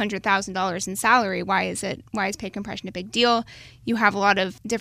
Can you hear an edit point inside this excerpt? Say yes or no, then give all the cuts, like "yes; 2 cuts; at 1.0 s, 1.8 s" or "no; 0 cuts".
no; 0 cuts